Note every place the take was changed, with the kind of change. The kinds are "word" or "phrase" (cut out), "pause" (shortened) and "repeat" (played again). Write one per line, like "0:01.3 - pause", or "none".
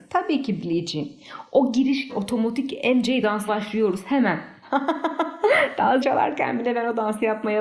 0:02.1 - word
0:03.5 - word
0:06.0 - word